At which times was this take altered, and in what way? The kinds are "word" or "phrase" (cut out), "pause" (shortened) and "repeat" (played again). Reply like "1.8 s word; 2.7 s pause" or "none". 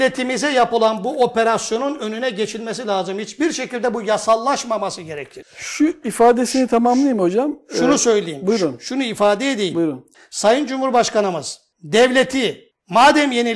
none

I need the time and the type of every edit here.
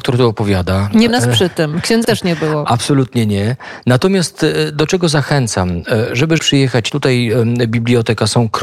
1.1 s word; 2.0 s word; 6.4 s word; 6.9 s word

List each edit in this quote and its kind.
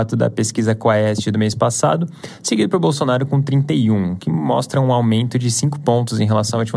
none

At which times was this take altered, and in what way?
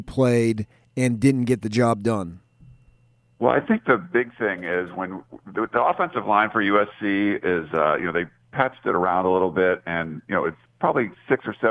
none

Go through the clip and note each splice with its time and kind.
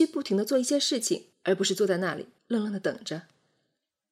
1.3 s pause; 2.4 s pause

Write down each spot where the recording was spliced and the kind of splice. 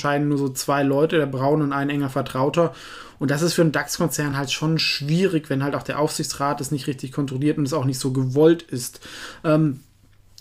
none

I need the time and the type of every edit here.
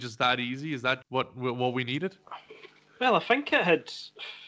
1.0 s word

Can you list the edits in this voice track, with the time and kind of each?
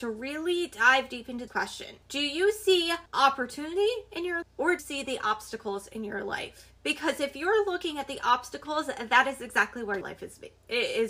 1.5 s word; 2.0 s pause; 3.1 s pause; 4.4 s word; 4.8 s word; 6.8 s pause; 10.0 s word

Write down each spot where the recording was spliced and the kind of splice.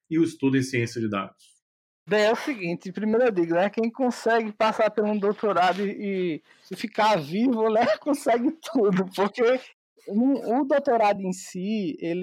none

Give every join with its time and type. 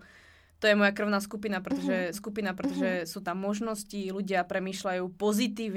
2.1 s repeat

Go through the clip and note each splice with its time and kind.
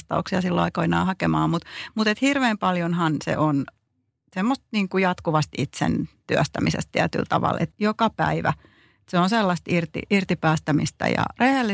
7.7 s word

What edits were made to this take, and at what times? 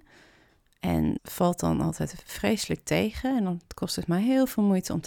1.2 s word

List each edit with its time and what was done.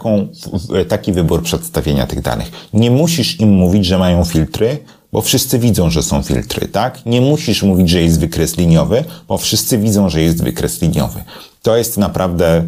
none

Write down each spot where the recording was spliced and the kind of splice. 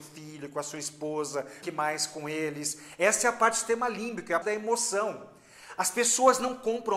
1.6 s word; 4.4 s word

